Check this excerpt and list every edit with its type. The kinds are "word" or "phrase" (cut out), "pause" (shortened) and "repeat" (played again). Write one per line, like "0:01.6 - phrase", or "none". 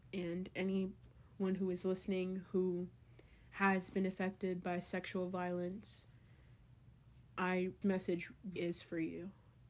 0:07.8 - word
0:08.6 - word